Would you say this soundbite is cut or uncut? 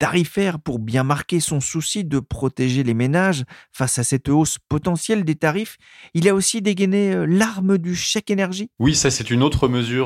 uncut